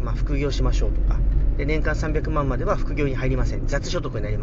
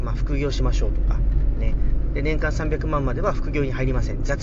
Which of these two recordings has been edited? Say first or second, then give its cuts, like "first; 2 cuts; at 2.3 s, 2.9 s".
first; 1 cut; at 1.6 s